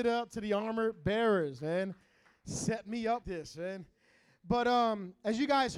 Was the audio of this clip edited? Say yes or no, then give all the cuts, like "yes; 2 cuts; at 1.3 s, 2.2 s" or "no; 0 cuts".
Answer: yes; 1 cut; at 3.2 s